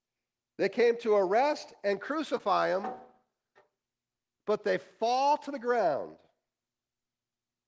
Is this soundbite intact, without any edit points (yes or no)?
yes